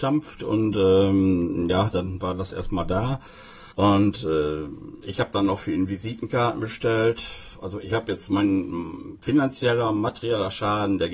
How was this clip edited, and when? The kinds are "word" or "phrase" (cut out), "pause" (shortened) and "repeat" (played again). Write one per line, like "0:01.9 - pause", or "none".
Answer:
0:02.5 - word
0:03.7 - pause